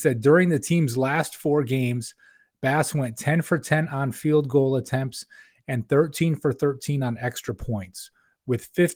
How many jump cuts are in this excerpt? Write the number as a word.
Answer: zero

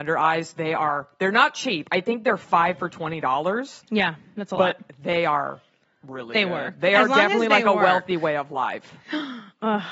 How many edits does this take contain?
zero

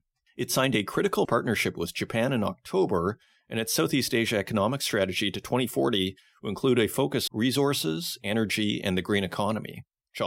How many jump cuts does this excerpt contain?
two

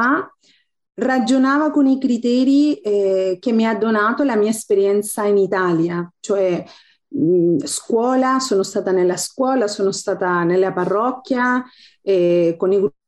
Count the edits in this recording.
zero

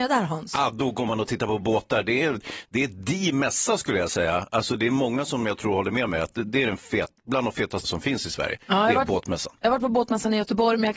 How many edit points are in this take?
two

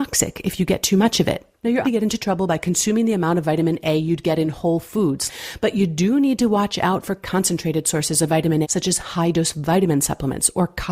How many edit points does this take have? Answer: two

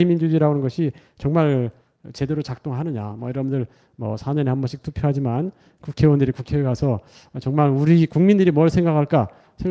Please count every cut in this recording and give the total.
zero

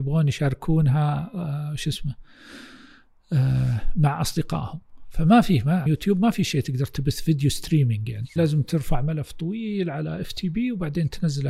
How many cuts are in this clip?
two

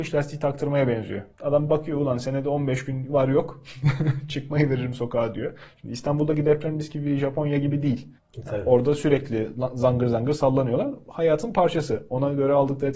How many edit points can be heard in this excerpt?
two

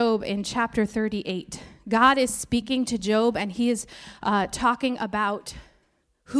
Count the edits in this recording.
zero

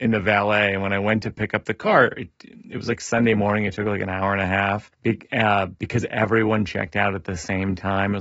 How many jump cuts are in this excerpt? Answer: one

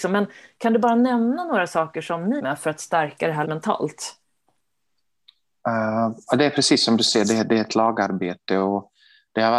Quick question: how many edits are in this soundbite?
two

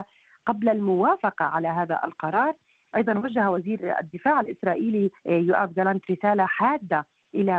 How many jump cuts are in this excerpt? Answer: one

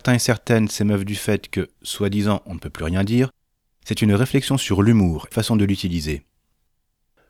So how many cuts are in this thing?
one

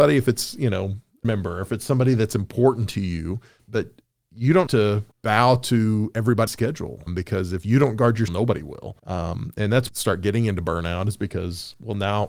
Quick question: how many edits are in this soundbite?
nine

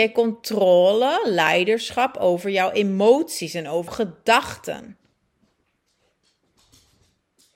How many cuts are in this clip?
one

